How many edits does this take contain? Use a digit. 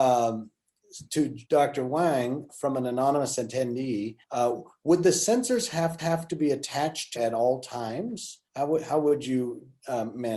6